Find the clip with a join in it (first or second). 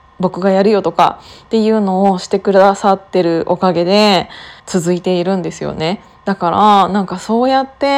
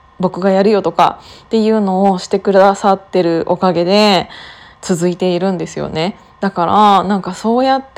first